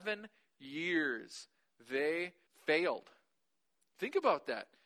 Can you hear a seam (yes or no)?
yes